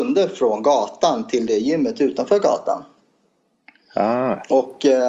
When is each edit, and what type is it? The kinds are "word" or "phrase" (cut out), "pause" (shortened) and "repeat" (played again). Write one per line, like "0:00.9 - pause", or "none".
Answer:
none